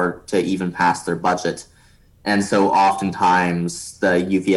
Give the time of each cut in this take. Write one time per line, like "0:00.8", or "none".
none